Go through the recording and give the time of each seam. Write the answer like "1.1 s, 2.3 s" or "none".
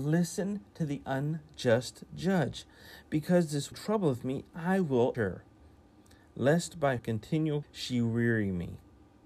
3.7 s, 5.1 s, 7.0 s, 7.6 s